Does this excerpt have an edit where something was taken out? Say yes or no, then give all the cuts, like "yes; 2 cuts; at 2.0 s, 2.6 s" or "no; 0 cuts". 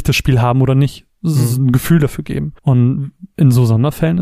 yes; 1 cut; at 2.6 s